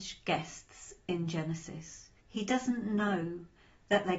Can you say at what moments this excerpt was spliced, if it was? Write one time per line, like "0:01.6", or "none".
0:02.2